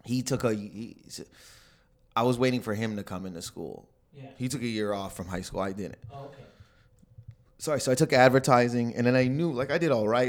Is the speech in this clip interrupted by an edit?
no; 0 cuts

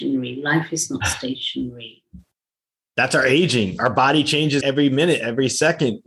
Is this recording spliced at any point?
yes; 1 cut; at 4.6 s

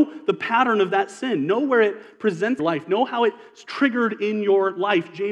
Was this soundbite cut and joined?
yes; 1 cut; at 2.6 s

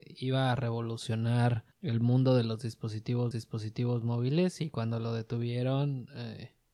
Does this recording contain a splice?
yes; 2 cuts; at 1.7 s, 3.3 s

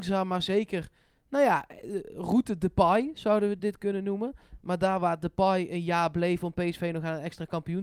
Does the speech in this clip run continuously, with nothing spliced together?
yes; 0 cuts

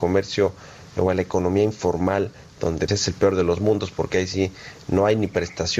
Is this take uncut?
no; 1 cut; at 2.9 s

